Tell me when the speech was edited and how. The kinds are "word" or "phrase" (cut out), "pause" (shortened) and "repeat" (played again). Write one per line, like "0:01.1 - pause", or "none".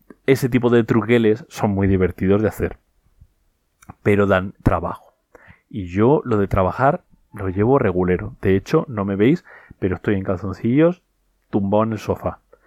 none